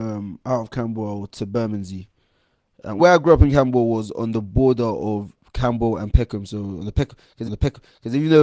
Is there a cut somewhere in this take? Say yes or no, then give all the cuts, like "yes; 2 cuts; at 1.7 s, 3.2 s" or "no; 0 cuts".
yes; 2 cuts; at 3.0 s, 7.5 s